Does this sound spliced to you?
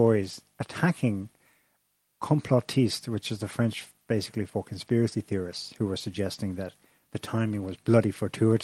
no; 0 cuts

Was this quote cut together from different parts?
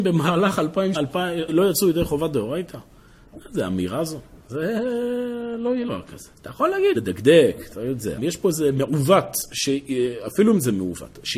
yes; 7 cuts; at 0.9 s, 1.5 s, 4.4 s, 5.9 s, 6.3 s, 7.0 s, 8.2 s

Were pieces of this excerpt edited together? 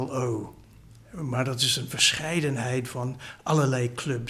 no; 0 cuts

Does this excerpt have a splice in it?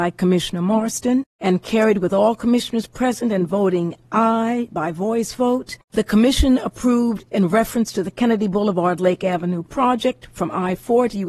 yes; 2 cuts; at 1.3 s, 5.8 s

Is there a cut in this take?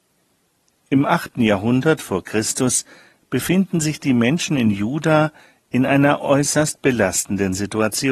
no; 0 cuts

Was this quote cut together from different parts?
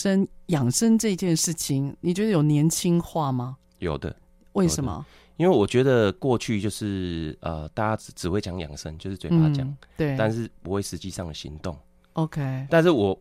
no; 0 cuts

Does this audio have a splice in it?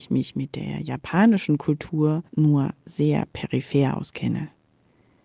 yes; 1 cut; at 2.3 s

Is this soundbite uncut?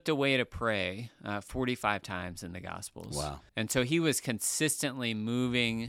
no; 1 cut; at 3.5 s

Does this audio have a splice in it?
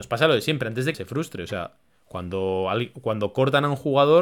yes; 1 cut; at 0.9 s

